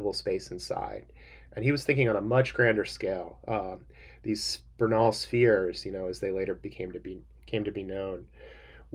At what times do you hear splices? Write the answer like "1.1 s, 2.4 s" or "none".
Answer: none